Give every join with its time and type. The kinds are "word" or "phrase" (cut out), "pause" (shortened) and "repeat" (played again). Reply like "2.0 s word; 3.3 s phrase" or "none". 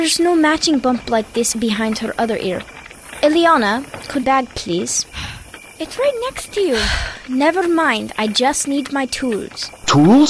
4.2 s phrase